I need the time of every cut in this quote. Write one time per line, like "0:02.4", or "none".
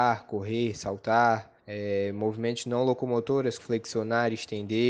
0:01.6
0:03.6